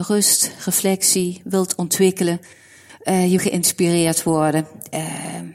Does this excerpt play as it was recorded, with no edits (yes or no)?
no